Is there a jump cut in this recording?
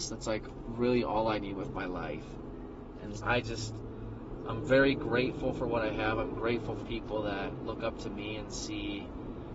yes; 2 cuts; at 3.2 s, 6.8 s

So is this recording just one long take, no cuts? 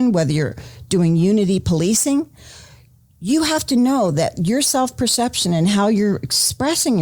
yes; 0 cuts

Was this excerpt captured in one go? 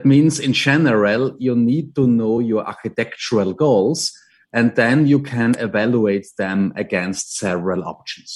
yes; 0 cuts

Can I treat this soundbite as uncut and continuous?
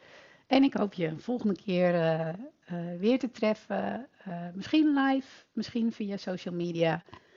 yes; 0 cuts

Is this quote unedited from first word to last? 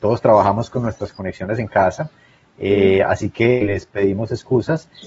yes; 0 cuts

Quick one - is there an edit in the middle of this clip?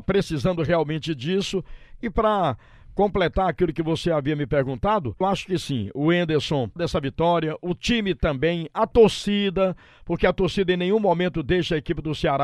yes; 2 cuts; at 5.2 s, 6.8 s

